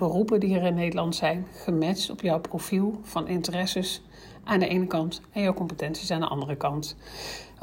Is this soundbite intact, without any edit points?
yes; 0 cuts

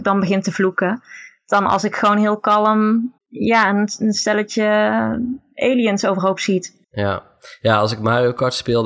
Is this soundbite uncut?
no; 2 cuts; at 3.2 s, 6.8 s

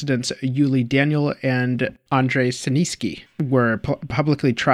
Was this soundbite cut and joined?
no; 0 cuts

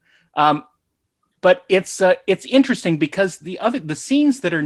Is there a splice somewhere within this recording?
no; 0 cuts

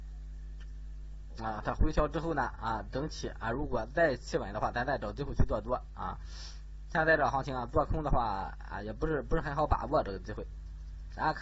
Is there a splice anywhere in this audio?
no; 0 cuts

